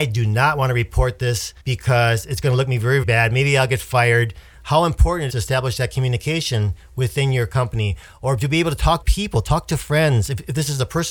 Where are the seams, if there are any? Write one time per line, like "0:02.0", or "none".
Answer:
0:01.6
0:03.0
0:05.3
0:09.0